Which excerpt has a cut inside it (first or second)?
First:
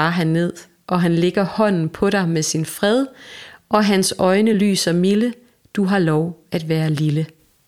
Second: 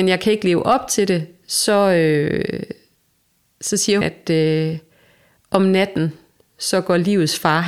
second